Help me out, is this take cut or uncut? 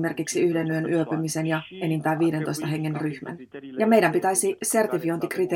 uncut